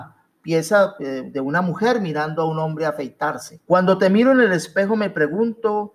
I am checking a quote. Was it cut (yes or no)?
yes